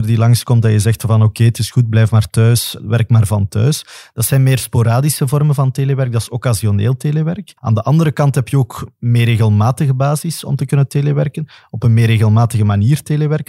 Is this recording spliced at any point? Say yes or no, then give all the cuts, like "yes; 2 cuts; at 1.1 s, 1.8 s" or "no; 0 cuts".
yes; 1 cut; at 7.6 s